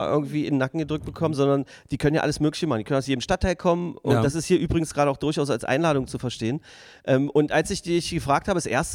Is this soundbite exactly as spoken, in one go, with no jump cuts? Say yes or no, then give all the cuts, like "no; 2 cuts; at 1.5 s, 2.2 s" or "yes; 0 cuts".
yes; 0 cuts